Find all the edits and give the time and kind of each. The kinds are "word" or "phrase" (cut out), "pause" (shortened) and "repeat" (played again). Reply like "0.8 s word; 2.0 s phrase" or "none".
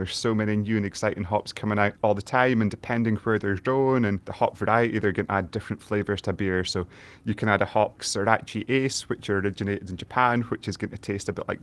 2.0 s pause; 4.2 s pause; 8.0 s word